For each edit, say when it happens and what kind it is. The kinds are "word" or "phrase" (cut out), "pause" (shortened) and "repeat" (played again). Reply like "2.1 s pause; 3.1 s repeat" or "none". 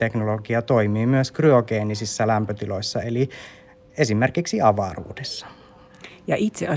none